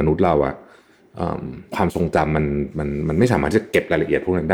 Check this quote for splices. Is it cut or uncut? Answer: cut